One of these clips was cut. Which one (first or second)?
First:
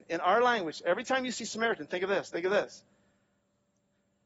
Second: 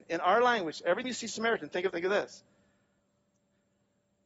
second